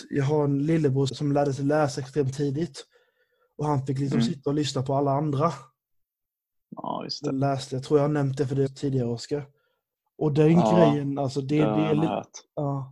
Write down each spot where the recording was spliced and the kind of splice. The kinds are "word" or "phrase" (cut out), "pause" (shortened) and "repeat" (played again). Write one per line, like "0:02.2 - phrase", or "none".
0:01.1 - word
0:07.3 - word
0:08.7 - word